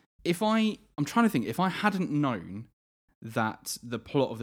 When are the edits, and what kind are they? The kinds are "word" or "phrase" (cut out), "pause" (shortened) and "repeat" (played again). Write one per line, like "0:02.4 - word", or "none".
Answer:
none

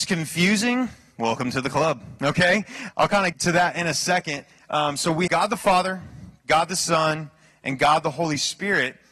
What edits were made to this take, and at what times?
0:02.9 - word
0:03.3 - word
0:05.3 - word

